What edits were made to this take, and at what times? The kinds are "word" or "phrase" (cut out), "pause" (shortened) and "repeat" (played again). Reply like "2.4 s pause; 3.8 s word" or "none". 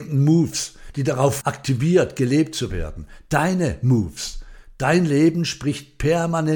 1.4 s word